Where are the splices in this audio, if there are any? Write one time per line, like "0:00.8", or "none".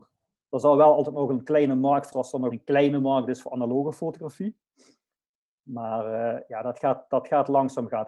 0:02.1
0:02.5